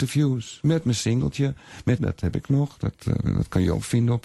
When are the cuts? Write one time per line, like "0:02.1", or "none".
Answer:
0:02.0